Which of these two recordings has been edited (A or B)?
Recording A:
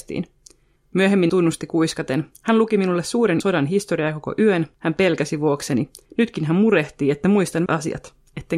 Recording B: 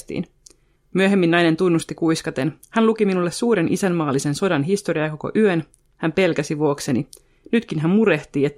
A